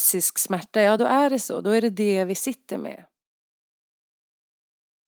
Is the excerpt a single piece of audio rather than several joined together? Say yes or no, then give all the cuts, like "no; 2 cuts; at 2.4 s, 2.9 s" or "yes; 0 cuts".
yes; 0 cuts